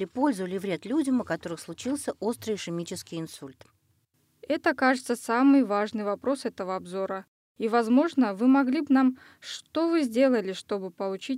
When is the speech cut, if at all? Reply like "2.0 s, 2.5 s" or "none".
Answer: 8.8 s